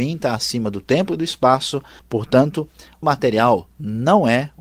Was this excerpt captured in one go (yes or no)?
no